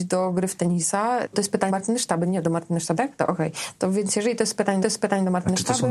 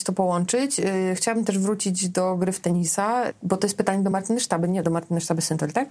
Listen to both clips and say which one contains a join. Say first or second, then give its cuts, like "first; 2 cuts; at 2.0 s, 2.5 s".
first; 4 cuts; at 1.3 s, 1.7 s, 3.0 s, 4.8 s